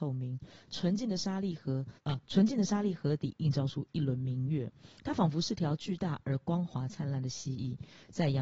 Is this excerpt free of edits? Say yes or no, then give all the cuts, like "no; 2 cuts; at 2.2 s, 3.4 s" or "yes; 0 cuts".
no; 1 cut; at 2.0 s